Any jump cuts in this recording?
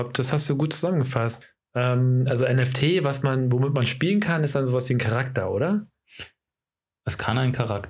no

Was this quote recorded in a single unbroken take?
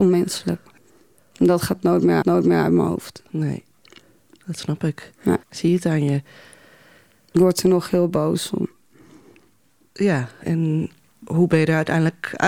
no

